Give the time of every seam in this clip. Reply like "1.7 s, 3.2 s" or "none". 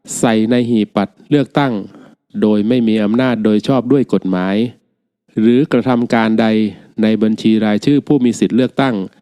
none